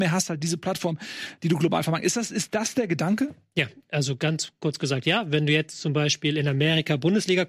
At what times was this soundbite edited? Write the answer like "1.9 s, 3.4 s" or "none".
none